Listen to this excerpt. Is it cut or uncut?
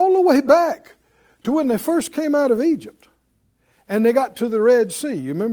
uncut